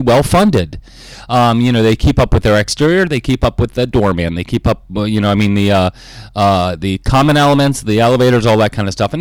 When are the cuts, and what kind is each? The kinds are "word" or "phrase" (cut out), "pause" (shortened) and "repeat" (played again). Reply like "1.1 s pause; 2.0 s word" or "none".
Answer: none